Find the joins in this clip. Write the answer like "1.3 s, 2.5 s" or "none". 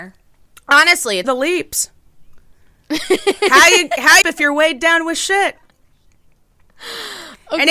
1.2 s, 4.2 s